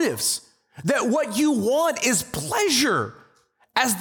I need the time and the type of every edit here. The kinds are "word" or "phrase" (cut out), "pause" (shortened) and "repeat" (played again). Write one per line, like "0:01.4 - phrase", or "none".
none